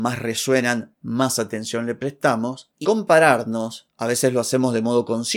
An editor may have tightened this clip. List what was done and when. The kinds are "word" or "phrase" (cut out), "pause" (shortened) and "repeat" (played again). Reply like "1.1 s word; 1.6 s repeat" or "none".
2.8 s word